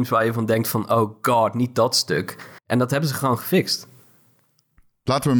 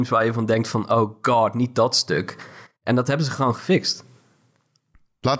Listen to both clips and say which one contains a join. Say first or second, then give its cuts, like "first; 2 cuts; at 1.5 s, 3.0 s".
first; 1 cut; at 2.6 s